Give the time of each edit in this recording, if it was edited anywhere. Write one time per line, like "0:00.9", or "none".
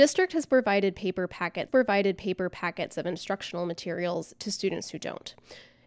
0:01.7